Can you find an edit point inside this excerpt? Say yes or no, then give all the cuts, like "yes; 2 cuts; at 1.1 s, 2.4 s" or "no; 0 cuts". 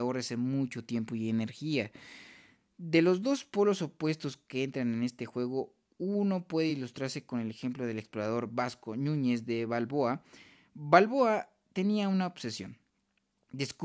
no; 0 cuts